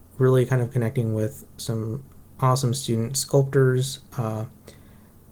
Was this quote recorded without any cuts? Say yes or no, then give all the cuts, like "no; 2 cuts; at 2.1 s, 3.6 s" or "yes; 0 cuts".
yes; 0 cuts